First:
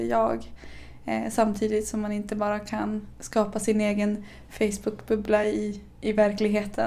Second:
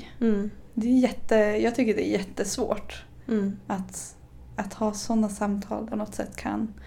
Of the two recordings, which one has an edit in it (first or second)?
second